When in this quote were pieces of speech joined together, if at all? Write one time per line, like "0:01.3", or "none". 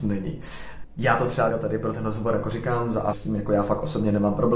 0:01.5
0:01.9
0:03.1